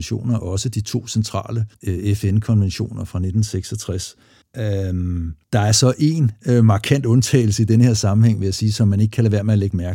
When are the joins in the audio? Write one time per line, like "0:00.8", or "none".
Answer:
0:01.7
0:04.4
0:05.4

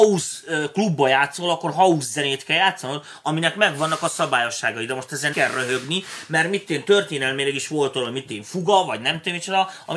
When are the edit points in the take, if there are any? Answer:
0:05.3

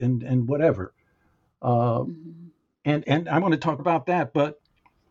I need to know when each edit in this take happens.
0:03.0
0:03.8

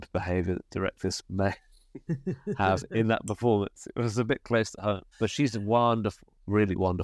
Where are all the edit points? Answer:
0:05.1

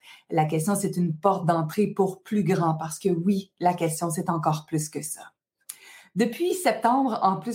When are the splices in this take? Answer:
none

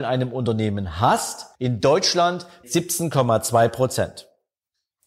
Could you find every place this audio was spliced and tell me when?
0:01.5
0:02.6

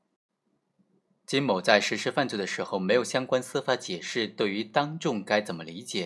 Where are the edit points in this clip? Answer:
none

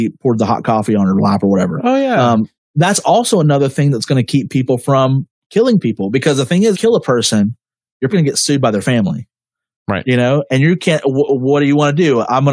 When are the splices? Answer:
0:06.7
0:08.1

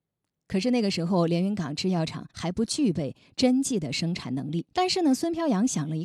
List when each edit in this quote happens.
0:02.3
0:04.7

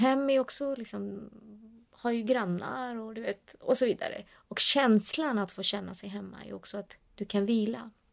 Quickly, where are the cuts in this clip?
0:04.3

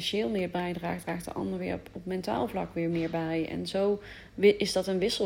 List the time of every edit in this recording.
none

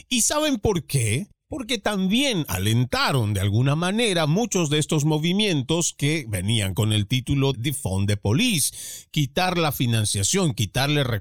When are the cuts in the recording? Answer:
0:07.5

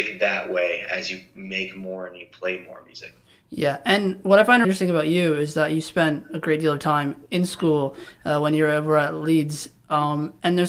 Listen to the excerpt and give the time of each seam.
0:04.6

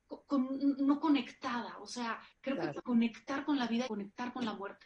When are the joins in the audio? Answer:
0:02.3
0:02.8
0:03.9

